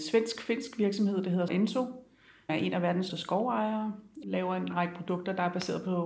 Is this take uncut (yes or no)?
no